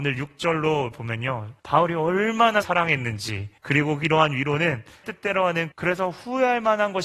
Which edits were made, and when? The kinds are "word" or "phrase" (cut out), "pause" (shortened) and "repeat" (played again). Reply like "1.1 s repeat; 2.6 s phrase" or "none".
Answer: 0.9 s word; 1.6 s pause; 2.6 s word; 3.6 s pause; 5.0 s word; 5.7 s word

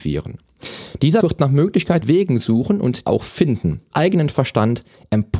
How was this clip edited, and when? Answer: 1.2 s word; 2.0 s word; 3.1 s word; 3.9 s word

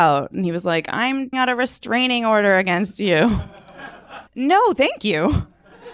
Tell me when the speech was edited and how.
1.3 s word; 4.3 s word

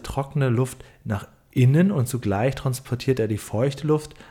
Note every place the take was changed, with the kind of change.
none

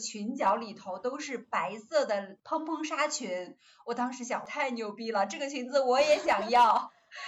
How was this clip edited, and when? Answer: none

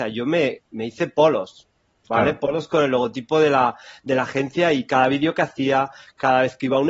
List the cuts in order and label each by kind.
none

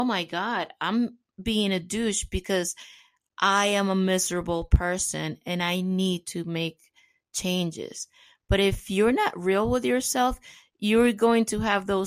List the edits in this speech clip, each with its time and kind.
none

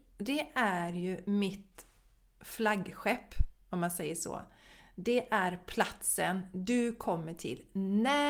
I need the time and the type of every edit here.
none

